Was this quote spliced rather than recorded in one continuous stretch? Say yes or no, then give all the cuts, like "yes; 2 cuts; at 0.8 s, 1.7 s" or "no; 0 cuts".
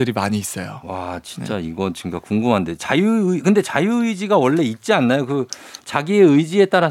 no; 0 cuts